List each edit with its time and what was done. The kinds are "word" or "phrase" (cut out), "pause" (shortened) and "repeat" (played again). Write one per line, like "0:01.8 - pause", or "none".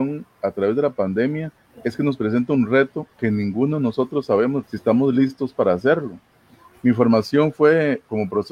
0:04.6 - word